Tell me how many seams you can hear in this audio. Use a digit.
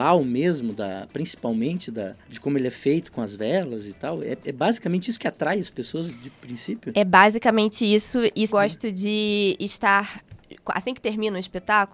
2